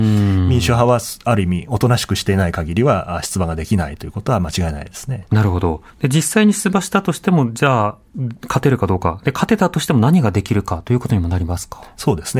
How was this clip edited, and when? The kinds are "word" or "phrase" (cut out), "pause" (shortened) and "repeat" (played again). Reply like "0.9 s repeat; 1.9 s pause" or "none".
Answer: 5.9 s pause